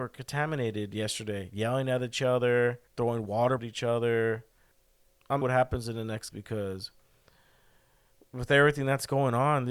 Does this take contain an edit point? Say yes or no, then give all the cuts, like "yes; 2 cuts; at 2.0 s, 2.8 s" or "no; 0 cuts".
yes; 4 cuts; at 2.9 s, 3.6 s, 5.4 s, 6.3 s